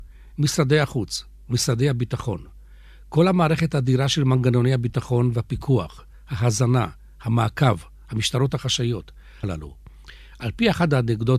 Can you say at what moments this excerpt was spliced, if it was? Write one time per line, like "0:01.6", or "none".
0:09.4